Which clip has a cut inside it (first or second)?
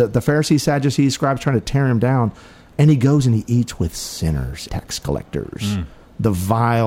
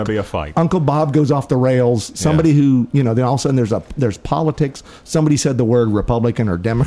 first